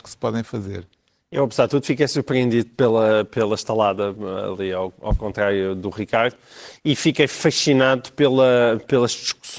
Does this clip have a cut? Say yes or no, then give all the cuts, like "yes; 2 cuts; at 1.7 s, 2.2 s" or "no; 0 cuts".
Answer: no; 0 cuts